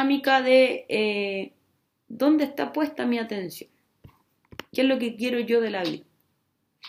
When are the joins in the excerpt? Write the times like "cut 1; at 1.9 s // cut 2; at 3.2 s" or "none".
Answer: none